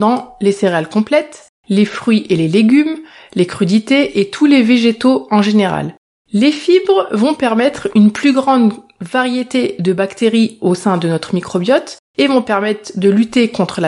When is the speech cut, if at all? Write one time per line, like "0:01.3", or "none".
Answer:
none